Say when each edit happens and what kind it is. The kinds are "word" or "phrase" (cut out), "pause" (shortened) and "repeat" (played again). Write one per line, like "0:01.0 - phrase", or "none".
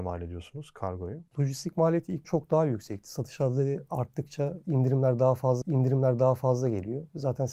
0:02.2 - word
0:05.6 - repeat